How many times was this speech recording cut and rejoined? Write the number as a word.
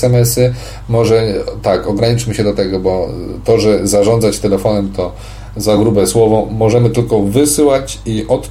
zero